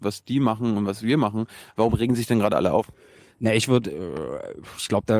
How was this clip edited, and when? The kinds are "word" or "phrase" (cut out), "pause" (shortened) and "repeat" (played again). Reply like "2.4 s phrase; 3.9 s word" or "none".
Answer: none